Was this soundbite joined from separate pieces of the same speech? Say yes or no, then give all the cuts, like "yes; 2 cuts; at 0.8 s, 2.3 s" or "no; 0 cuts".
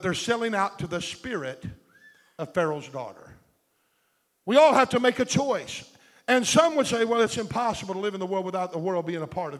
no; 0 cuts